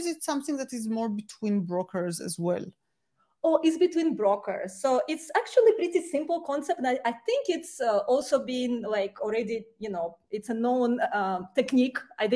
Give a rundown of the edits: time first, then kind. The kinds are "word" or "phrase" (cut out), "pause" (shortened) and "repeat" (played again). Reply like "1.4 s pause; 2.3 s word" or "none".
none